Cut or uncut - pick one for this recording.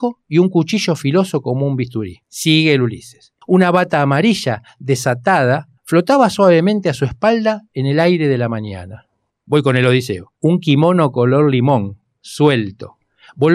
cut